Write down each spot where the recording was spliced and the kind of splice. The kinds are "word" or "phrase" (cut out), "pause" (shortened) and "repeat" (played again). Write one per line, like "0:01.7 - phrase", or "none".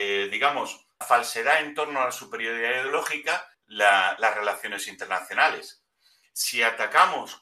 0:01.0 - phrase
0:03.5 - phrase